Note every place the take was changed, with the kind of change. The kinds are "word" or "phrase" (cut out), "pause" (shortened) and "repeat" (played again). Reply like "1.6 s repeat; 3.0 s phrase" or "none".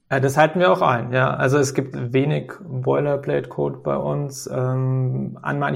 1.9 s word